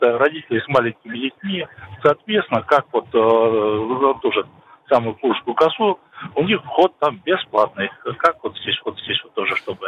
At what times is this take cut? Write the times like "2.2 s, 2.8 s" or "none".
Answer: 4.2 s, 8.8 s